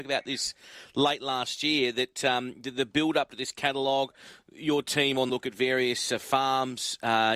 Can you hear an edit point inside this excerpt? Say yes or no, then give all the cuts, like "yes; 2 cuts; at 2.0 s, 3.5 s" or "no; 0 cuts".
yes; 1 cut; at 5.3 s